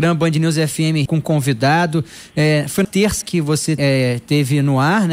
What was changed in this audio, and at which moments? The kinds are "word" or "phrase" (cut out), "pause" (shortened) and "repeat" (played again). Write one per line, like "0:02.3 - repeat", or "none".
0:01.1 - phrase
0:02.8 - word
0:03.2 - word
0:03.8 - word

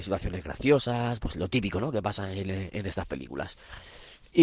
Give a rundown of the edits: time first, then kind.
none

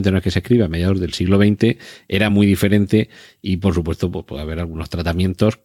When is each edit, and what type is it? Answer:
none

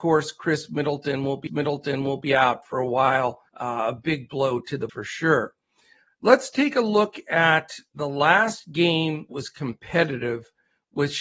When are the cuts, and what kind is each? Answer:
0:01.5 - repeat
0:03.5 - pause
0:04.9 - word
0:09.3 - word

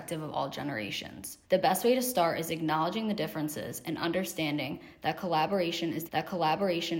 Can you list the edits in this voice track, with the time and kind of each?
0:01.4 - pause
0:06.1 - repeat

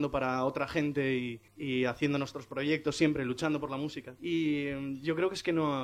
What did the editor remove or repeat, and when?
0:01.5 - pause
0:04.2 - pause

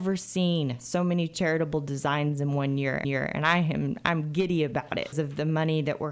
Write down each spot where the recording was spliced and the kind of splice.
0:03.0 - repeat
0:05.1 - word

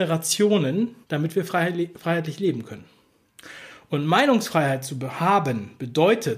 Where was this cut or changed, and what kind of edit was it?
0:01.0 - pause

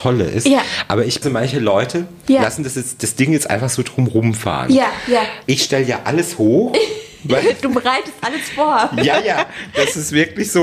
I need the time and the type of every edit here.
0:01.2 - phrase
0:05.4 - pause

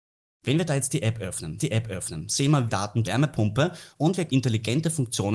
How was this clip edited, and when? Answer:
0:01.6 - repeat
0:02.7 - word
0:03.0 - phrase
0:03.9 - pause
0:04.3 - word

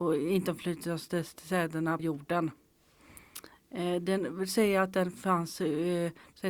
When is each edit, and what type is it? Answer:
0:02.0 - phrase

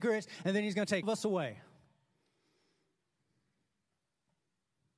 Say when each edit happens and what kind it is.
0:01.0 - word

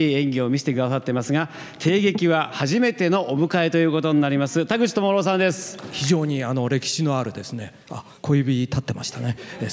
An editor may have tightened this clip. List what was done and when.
0:08.2 - pause

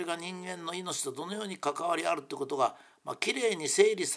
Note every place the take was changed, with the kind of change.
none

